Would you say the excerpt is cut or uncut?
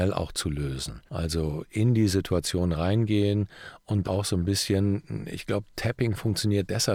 cut